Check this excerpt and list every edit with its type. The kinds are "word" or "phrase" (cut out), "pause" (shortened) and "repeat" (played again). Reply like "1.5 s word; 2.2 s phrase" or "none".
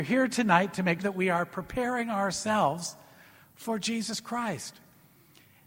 1.0 s word